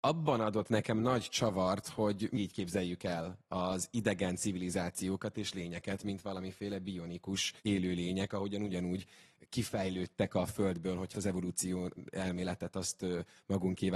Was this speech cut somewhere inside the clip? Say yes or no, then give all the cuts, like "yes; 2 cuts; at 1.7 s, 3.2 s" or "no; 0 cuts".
yes; 3 cuts; at 2.3 s, 7.6 s, 11.1 s